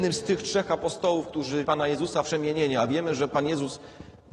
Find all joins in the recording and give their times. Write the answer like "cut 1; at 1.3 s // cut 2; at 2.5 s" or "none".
cut 1; at 1.6 s // cut 2; at 2.2 s